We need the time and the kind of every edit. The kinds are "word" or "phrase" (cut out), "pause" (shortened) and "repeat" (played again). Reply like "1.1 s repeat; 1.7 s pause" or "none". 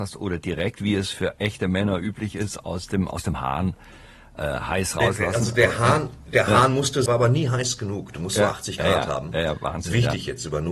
7.1 s phrase